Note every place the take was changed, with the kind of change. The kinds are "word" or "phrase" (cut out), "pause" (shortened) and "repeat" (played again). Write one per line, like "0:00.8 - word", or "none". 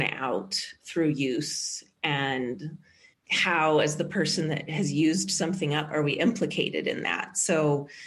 none